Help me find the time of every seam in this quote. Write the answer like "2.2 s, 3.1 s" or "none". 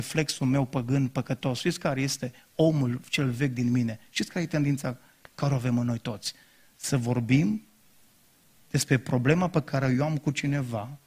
none